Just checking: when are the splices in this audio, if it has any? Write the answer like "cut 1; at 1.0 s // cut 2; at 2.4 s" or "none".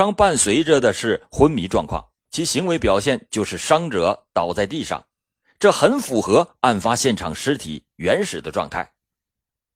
cut 1; at 2.2 s